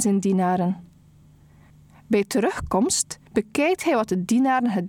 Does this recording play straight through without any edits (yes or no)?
yes